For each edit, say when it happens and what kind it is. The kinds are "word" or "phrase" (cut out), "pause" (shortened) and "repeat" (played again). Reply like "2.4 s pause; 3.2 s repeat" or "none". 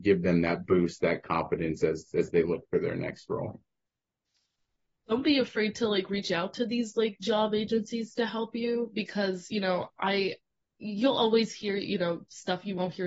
none